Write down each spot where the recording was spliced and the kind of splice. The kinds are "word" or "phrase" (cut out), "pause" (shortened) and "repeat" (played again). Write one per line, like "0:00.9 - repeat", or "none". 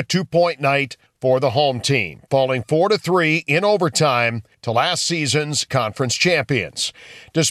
0:05.7 - word